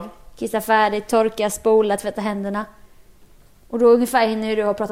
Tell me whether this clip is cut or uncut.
uncut